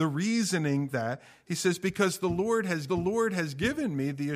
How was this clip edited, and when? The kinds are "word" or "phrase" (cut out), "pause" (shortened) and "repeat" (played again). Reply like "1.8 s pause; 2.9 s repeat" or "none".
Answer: 0.9 s word; 2.9 s repeat